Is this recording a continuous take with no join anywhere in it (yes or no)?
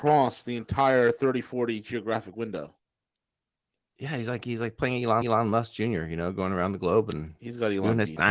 no